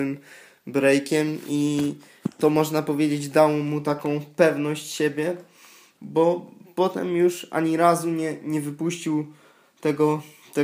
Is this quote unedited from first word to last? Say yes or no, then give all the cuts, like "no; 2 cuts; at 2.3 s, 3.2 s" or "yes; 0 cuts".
yes; 0 cuts